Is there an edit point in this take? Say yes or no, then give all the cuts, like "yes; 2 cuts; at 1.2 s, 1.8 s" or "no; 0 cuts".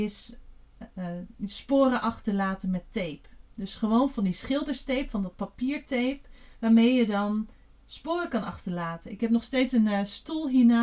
no; 0 cuts